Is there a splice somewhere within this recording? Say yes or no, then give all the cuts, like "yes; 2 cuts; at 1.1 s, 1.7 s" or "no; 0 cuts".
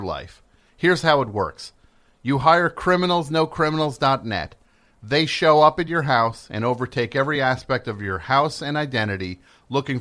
no; 0 cuts